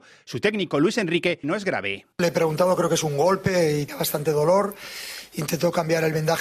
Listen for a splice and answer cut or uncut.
cut